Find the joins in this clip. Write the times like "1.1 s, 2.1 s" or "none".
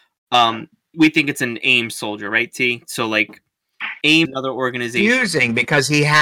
0.9 s, 4.2 s